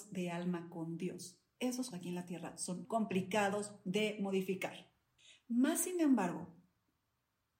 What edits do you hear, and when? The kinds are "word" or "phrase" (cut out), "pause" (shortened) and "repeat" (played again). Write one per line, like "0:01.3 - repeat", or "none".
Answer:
0:01.9 - word
0:02.8 - word
0:05.2 - pause